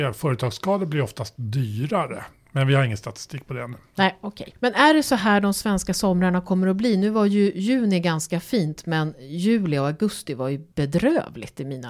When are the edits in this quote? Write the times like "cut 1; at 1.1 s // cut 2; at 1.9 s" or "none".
cut 1; at 4.6 s // cut 2; at 10.7 s